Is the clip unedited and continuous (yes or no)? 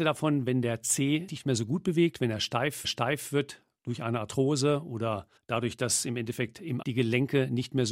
no